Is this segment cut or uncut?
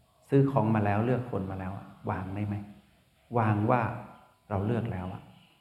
uncut